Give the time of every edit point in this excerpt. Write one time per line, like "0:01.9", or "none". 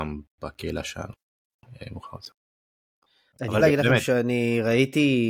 0:03.6